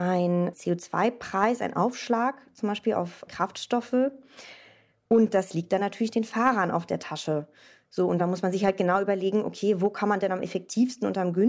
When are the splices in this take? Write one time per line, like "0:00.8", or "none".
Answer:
none